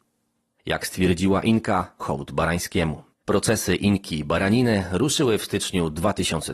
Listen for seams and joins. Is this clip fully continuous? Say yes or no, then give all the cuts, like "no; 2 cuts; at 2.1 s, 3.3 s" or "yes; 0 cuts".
no; 2 cuts; at 2.0 s, 3.1 s